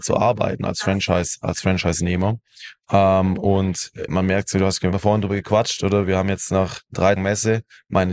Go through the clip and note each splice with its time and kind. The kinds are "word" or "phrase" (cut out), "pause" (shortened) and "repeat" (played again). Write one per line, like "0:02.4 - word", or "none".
0:04.1 - word
0:04.9 - word
0:07.2 - word